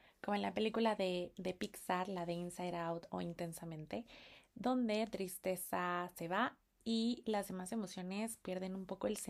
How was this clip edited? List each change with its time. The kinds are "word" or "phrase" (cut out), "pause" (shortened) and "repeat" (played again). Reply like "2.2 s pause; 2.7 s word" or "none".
none